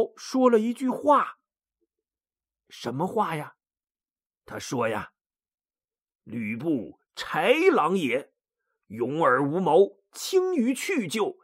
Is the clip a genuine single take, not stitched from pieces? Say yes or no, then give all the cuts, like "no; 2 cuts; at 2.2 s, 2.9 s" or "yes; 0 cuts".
yes; 0 cuts